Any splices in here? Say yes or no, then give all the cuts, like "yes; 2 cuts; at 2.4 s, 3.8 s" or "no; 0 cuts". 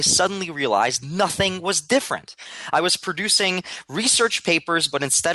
no; 0 cuts